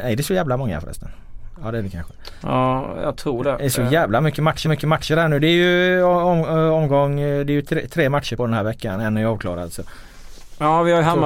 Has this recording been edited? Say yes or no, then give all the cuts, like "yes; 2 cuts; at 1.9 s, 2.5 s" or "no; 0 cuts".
yes; 2 cuts; at 4.7 s, 8.4 s